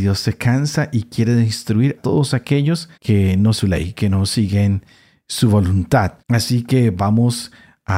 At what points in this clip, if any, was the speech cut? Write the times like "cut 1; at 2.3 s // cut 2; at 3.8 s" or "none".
cut 1; at 2.0 s // cut 2; at 2.9 s // cut 3; at 3.6 s // cut 4; at 6.2 s